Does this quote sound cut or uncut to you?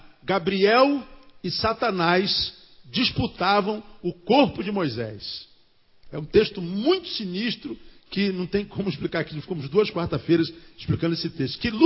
uncut